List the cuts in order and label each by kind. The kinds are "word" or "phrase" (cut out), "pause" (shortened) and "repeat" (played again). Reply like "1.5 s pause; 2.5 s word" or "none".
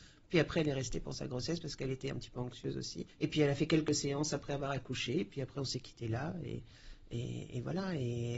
3.1 s pause